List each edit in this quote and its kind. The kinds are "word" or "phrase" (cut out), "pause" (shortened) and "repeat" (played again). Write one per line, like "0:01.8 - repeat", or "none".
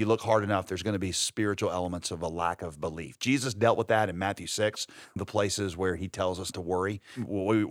0:05.2 - word
0:06.5 - word